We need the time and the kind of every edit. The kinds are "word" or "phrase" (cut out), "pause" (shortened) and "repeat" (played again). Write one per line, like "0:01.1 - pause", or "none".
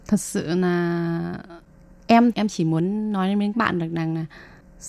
0:02.3 - word
0:03.5 - word